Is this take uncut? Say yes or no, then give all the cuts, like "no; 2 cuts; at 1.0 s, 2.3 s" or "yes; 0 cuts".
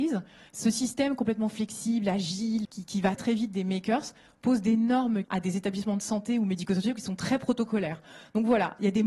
no; 3 cuts; at 2.6 s, 3.2 s, 5.2 s